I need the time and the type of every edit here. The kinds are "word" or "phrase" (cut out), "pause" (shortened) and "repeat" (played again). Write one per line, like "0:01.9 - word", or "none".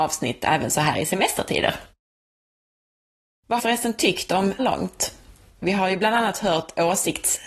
0:03.6 - phrase
0:04.6 - phrase